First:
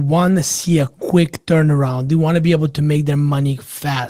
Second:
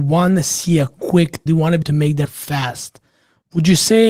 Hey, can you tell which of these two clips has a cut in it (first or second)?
second